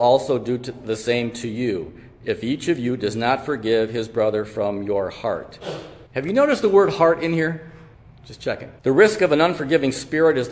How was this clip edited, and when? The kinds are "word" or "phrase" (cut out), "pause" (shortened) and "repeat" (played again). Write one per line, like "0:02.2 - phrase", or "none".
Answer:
0:06.1 - pause
0:07.9 - pause
0:08.8 - pause